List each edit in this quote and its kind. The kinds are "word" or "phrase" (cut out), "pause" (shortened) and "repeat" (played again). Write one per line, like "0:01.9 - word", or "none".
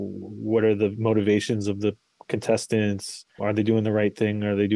0:03.4 - word

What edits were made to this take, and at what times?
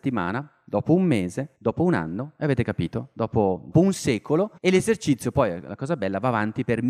0:01.5 - pause
0:03.7 - phrase
0:04.6 - pause

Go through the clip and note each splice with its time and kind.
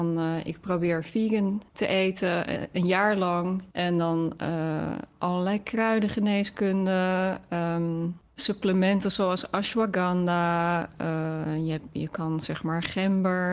0:01.7 - pause
0:03.7 - pause

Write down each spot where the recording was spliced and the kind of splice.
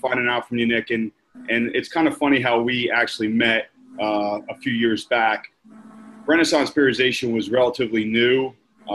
none

